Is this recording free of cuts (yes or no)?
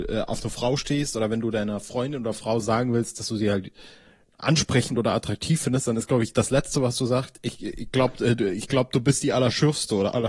yes